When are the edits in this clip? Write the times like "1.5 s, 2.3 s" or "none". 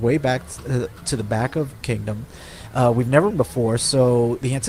1.8 s, 3.3 s